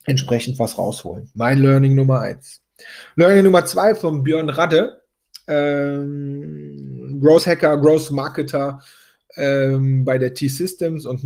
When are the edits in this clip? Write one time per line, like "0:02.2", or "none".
none